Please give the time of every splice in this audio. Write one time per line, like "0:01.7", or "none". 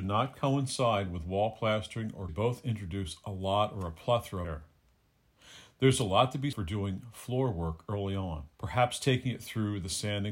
0:02.3
0:04.4
0:06.5
0:08.5